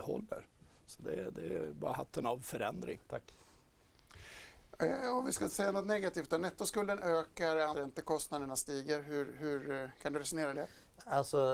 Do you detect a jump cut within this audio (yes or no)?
yes